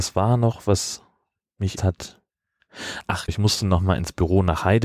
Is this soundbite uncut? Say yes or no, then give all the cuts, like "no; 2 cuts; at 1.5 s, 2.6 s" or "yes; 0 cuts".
no; 2 cuts; at 1.8 s, 3.3 s